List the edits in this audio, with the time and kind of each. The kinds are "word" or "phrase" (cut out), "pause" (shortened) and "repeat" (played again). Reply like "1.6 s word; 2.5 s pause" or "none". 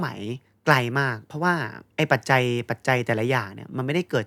1.9 s pause